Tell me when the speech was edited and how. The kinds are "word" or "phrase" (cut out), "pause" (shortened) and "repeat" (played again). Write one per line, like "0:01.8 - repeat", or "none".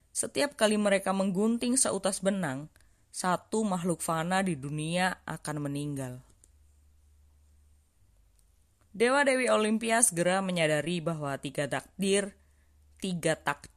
none